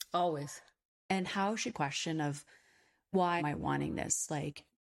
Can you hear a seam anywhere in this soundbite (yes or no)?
yes